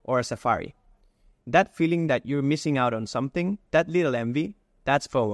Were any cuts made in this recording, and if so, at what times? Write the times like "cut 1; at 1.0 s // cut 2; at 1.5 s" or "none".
none